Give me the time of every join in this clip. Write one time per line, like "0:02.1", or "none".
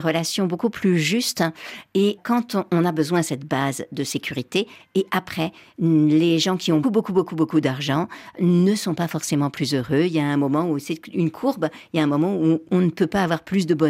0:06.8